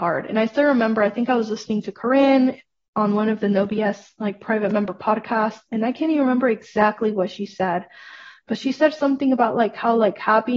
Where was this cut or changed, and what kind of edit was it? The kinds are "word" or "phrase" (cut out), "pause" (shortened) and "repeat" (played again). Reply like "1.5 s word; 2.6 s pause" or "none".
none